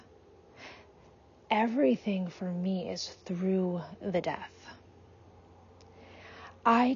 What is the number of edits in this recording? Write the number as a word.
zero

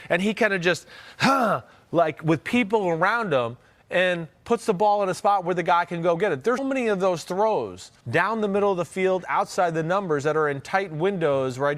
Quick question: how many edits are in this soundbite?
two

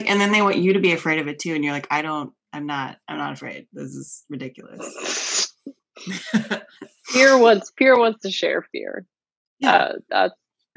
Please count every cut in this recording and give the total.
one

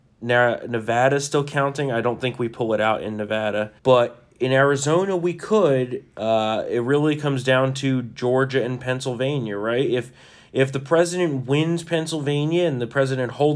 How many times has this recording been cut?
one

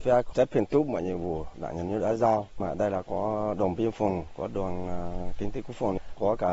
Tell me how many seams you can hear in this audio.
zero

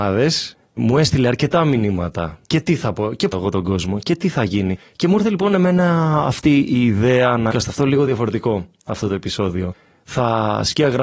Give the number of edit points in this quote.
two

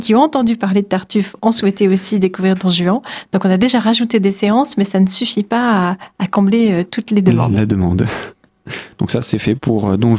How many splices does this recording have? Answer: zero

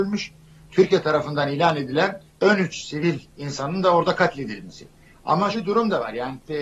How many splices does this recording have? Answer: two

